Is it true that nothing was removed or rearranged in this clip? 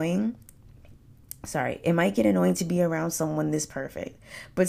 yes; 0 cuts

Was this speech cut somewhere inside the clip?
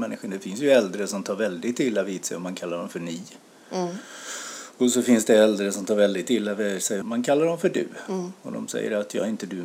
yes; 1 cut; at 7.0 s

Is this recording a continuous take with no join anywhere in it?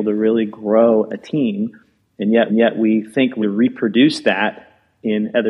no; 2 cuts; at 2.5 s, 3.4 s

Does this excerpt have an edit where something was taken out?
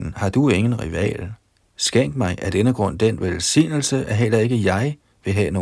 no; 0 cuts

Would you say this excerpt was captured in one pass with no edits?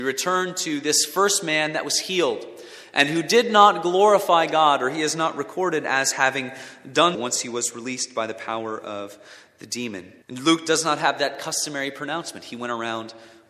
no; 2 cuts; at 7.1 s, 10.2 s

